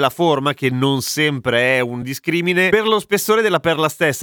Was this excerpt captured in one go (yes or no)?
yes